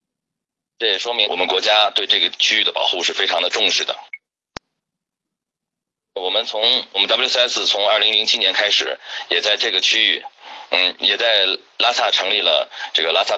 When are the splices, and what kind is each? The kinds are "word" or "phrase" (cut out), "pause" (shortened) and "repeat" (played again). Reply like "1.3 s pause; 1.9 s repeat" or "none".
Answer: 1.2 s word; 6.9 s word